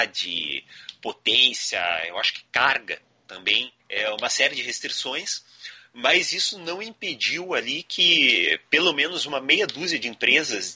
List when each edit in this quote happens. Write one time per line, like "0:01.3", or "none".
0:03.8